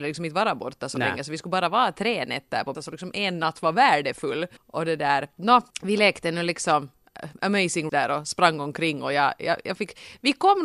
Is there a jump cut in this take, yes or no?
yes